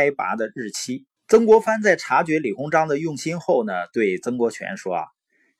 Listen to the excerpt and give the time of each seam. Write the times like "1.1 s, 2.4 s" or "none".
1.2 s